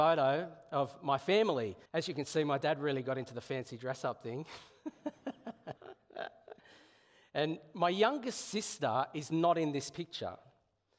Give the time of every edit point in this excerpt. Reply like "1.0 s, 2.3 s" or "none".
1.9 s, 5.8 s